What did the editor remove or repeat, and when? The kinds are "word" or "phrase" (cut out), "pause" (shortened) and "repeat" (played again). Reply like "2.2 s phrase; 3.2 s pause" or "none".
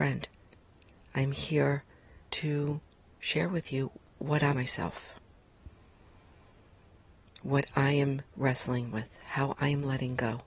2.2 s pause; 4.5 s word; 8.3 s pause